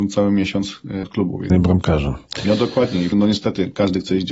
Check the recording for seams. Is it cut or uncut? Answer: cut